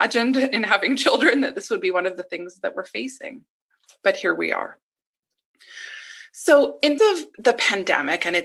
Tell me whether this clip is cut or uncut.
cut